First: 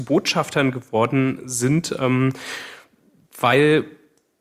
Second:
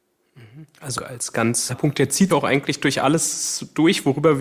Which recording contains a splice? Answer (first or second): second